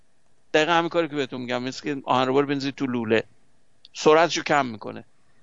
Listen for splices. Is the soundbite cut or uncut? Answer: uncut